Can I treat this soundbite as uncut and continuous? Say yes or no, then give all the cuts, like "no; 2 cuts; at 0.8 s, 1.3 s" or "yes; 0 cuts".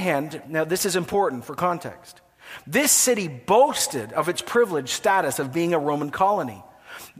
yes; 0 cuts